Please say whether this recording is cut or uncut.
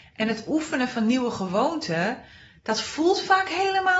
uncut